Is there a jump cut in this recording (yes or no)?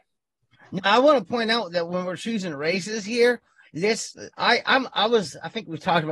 no